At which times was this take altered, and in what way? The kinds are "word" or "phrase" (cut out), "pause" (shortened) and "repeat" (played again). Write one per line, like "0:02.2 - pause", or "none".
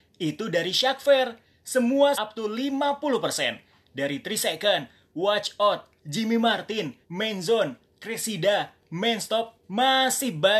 0:02.1 - word
0:06.0 - word
0:07.0 - word